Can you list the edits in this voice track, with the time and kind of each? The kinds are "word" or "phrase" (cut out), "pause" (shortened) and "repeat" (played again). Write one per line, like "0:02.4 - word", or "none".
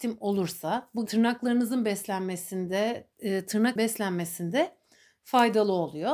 0:01.1 - phrase
0:03.1 - pause
0:03.8 - word